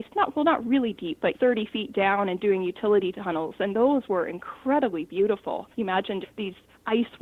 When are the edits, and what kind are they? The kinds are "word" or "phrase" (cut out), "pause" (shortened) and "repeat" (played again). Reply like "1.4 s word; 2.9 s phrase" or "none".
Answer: 1.3 s phrase; 5.7 s pause; 6.2 s word